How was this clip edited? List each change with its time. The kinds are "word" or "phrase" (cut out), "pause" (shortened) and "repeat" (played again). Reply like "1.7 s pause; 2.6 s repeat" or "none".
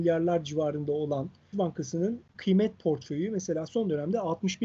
1.5 s word; 2.3 s word

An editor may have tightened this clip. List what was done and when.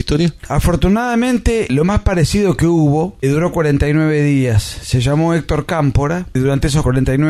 3.2 s word

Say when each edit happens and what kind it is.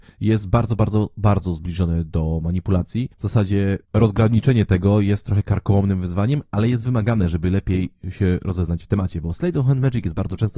3.1 s pause; 3.8 s pause

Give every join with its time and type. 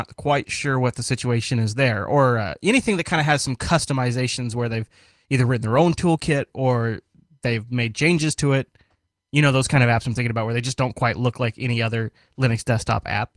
none

